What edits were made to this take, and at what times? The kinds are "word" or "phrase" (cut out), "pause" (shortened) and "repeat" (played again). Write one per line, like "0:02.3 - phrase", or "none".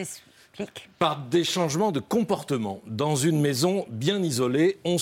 none